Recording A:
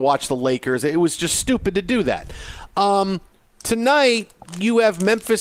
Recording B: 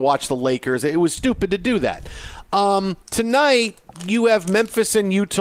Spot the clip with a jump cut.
B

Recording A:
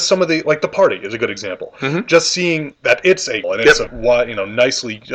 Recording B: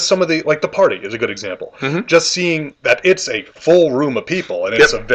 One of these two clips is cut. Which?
A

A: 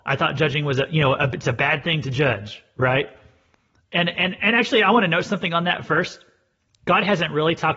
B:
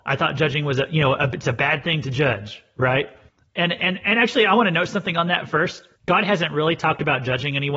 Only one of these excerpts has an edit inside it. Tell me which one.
B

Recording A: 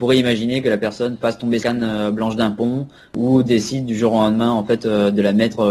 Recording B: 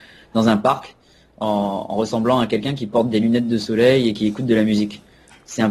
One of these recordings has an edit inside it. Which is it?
A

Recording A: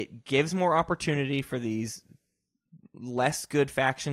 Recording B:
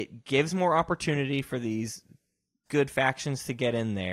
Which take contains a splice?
B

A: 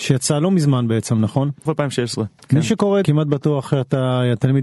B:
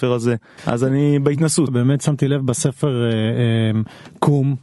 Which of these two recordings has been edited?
A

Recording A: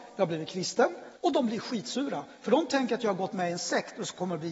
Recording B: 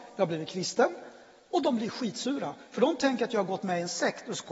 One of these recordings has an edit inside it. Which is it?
A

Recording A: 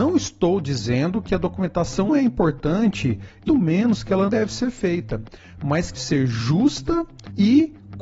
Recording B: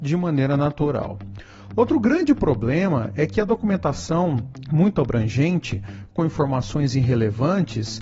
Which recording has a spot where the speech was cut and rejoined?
A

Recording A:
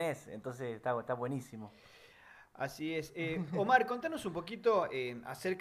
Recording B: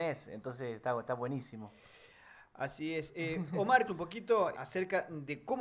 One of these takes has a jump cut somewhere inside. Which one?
B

